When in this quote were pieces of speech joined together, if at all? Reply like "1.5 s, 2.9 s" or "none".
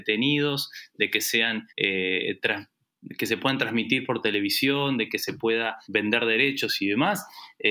1.7 s, 5.8 s